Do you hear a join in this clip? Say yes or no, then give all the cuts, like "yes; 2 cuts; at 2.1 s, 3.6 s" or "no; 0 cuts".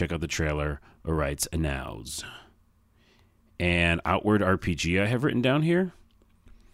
no; 0 cuts